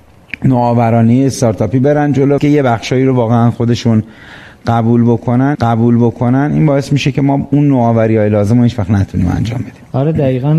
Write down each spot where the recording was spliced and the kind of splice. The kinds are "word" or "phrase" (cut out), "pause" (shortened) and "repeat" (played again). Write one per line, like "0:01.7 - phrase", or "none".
0:02.4 - phrase
0:05.5 - repeat

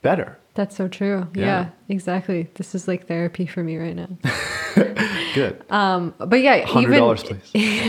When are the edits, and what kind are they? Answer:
none

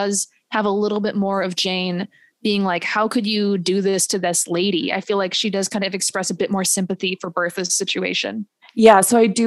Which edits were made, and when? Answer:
none

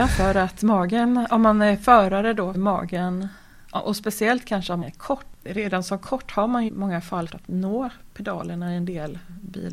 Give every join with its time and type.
0:02.5 - phrase
0:04.8 - word
0:06.7 - word
0:07.3 - word

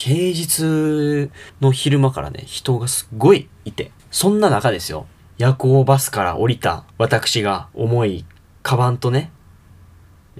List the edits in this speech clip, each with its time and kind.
0:01.5 - pause
0:04.0 - pause
0:05.2 - pause
0:06.9 - pause
0:07.7 - pause

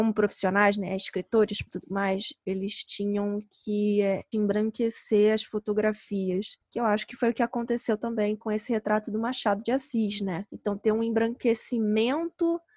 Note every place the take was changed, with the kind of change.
0:01.7 - word
0:04.3 - word

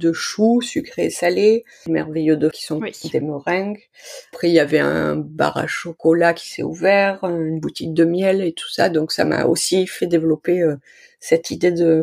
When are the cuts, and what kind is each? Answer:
0:02.5 - word

